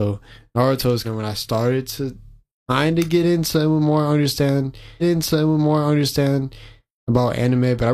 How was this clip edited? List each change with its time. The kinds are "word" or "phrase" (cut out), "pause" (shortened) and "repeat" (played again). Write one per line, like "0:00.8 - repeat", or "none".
0:01.0 - word
0:05.0 - repeat